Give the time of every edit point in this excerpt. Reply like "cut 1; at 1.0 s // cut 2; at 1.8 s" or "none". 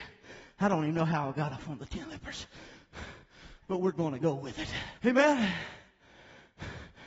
cut 1; at 5.0 s